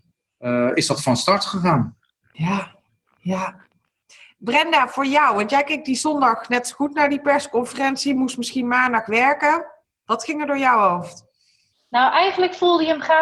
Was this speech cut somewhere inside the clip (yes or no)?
no